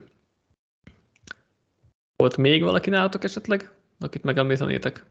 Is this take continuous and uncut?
yes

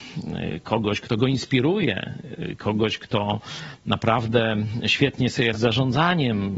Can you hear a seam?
yes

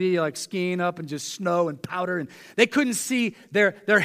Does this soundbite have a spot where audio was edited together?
no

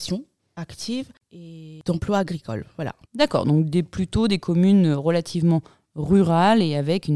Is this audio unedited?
no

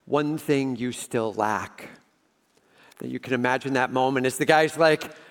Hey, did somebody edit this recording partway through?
no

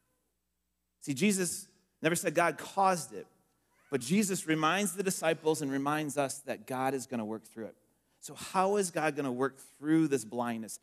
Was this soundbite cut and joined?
no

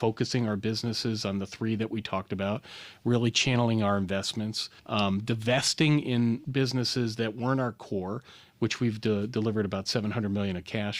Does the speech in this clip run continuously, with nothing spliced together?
no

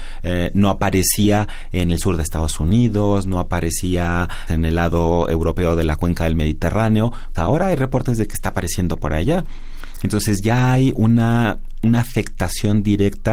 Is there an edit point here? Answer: yes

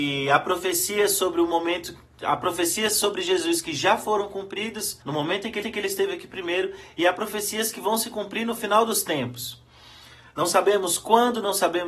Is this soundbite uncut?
no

